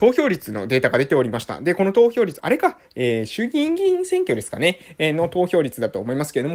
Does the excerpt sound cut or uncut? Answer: cut